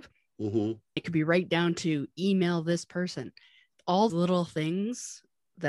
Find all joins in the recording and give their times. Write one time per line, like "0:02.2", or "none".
0:01.0
0:04.1